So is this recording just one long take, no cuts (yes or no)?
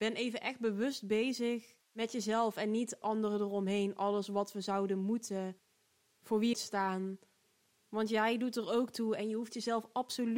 no